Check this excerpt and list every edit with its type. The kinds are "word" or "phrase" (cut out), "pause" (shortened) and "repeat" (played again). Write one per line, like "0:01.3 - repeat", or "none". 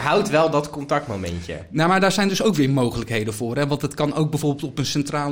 none